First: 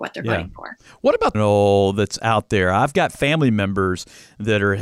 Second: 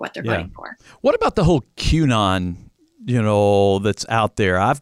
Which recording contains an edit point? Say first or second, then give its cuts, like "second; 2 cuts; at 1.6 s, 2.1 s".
first; 1 cut; at 1.3 s